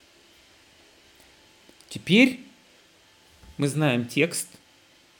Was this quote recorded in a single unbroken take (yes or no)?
yes